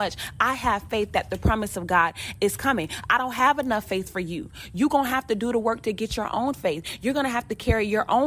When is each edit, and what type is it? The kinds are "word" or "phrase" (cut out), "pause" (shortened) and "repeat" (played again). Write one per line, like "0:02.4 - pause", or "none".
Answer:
none